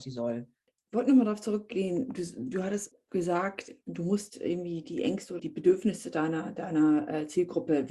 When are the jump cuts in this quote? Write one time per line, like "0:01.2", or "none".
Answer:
0:05.4